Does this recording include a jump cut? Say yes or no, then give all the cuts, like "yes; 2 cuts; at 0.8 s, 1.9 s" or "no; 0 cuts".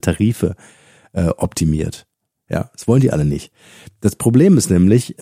no; 0 cuts